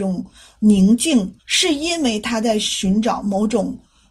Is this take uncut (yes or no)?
no